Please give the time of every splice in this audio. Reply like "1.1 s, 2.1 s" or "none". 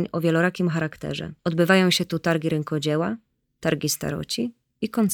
1.4 s